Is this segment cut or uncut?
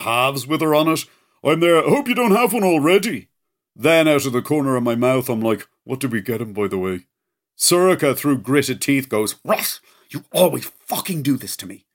uncut